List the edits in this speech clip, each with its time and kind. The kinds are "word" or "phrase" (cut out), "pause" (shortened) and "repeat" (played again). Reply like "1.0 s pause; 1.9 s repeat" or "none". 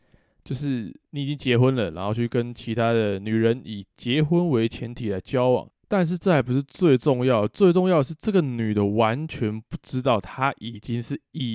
1.0 s pause; 5.8 s pause